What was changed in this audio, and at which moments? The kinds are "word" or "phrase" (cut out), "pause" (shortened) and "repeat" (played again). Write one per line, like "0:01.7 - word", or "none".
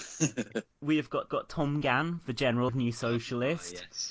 0:01.3 - repeat
0:02.7 - word